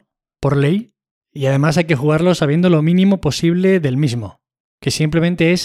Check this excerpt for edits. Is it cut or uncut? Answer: uncut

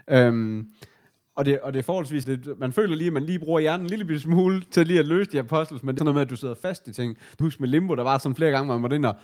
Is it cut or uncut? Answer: cut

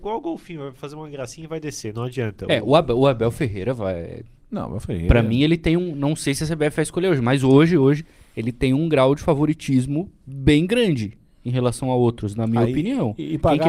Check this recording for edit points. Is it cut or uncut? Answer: uncut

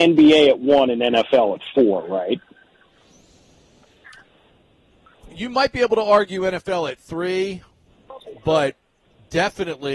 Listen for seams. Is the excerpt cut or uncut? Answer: uncut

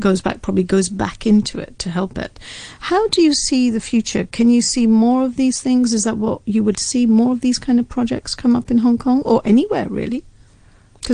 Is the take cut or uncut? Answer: cut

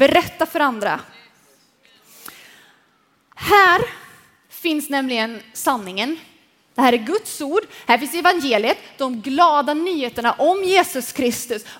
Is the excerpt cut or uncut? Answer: uncut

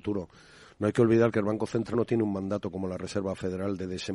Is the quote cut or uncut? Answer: cut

